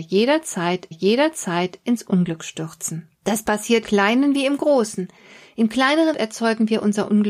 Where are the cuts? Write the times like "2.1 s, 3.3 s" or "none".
0.9 s, 3.1 s, 3.8 s, 6.1 s